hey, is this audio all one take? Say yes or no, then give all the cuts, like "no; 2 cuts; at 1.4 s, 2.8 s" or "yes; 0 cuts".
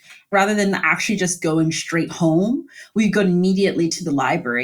yes; 0 cuts